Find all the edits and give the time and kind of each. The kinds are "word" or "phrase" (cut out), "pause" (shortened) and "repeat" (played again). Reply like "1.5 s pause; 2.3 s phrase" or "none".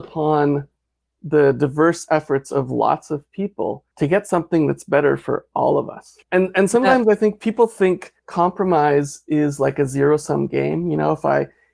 3.9 s pause; 6.2 s pause; 8.2 s pause